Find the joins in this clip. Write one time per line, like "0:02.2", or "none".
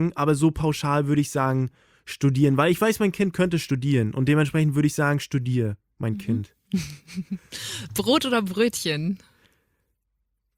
none

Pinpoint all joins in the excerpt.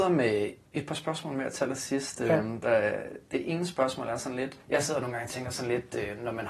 0:04.6

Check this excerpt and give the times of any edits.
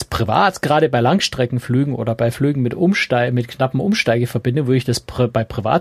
none

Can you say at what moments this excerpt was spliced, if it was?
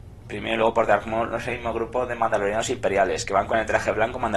none

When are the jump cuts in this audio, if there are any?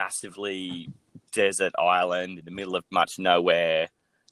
0:02.9

